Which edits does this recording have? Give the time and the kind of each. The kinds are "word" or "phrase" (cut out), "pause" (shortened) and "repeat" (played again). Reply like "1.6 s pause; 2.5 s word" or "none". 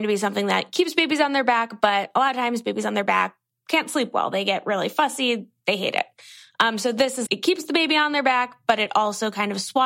7.3 s word